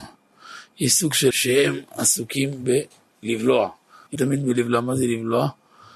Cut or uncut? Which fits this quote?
cut